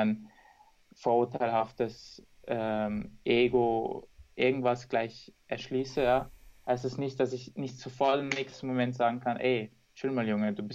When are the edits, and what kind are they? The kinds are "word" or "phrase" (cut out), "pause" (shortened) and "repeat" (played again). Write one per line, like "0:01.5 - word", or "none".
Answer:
none